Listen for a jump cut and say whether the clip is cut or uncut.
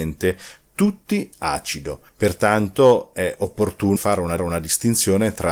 cut